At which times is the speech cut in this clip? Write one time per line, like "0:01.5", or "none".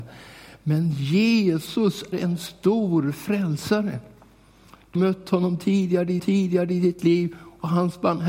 0:02.1
0:05.0
0:06.2